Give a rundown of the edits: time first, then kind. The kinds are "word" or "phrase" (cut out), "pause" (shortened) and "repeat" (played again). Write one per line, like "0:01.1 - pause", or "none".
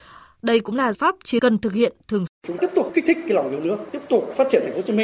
0:00.9 - word
0:01.4 - word
0:02.3 - word
0:02.6 - word